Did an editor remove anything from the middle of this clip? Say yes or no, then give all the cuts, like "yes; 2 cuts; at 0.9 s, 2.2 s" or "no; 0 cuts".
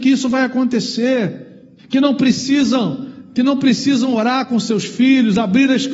yes; 1 cut; at 1.8 s